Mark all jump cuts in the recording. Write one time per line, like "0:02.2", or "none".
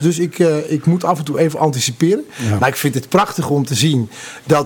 none